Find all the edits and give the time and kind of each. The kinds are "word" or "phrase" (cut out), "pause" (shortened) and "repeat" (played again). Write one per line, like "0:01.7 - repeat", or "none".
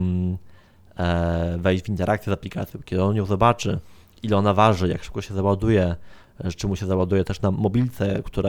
none